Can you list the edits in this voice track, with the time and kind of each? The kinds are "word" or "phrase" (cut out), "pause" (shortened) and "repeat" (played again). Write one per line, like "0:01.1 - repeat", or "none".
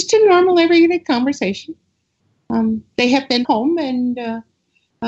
0:03.4 - phrase